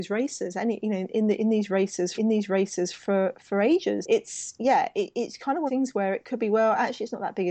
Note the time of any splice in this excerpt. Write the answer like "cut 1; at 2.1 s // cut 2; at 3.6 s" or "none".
cut 1; at 2.2 s // cut 2; at 4.0 s // cut 3; at 5.7 s